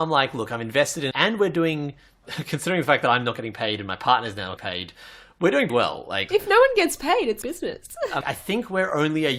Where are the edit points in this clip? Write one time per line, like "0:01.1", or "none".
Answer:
0:01.1
0:04.6
0:05.7
0:06.3
0:07.4
0:08.2